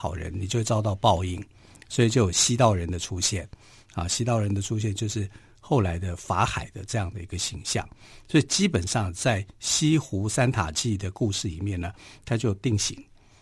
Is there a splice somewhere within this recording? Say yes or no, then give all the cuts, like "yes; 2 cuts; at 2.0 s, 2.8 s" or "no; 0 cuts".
no; 0 cuts